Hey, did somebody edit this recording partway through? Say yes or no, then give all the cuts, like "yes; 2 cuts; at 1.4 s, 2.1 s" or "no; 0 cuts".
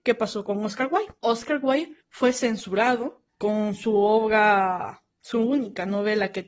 yes; 4 cuts; at 1.2 s, 2.0 s, 3.3 s, 5.1 s